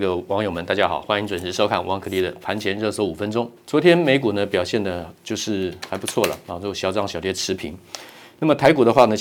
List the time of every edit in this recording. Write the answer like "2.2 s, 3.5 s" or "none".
3.6 s